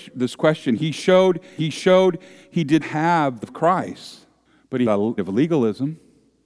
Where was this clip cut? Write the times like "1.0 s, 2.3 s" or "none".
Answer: 1.6 s, 2.8 s, 3.4 s, 4.5 s, 4.9 s, 5.2 s